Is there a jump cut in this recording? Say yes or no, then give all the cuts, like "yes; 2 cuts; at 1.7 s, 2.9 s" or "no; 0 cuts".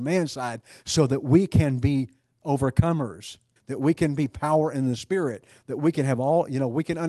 yes; 1 cut; at 3.6 s